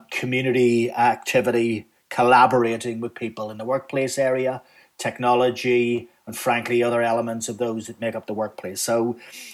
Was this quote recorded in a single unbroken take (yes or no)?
yes